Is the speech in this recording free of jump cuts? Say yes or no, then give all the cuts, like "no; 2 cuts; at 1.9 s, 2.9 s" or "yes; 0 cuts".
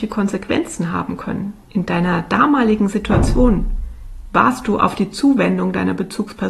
no; 1 cut; at 1.6 s